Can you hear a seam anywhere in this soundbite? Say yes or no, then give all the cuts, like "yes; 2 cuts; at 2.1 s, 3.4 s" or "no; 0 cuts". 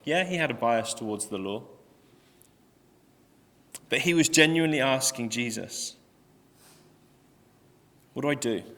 no; 0 cuts